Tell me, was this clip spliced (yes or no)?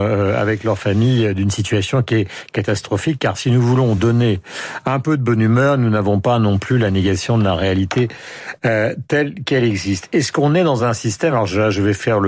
no